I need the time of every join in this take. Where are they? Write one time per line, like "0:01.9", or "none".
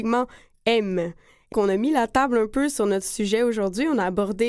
0:01.5